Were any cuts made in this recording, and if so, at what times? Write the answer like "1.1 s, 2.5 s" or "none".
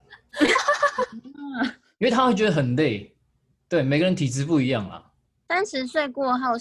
none